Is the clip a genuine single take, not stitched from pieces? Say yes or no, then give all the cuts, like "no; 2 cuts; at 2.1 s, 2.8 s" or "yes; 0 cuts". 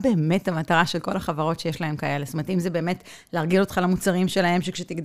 yes; 0 cuts